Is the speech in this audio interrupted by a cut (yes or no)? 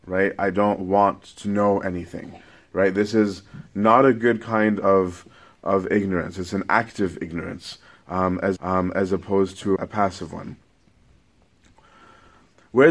yes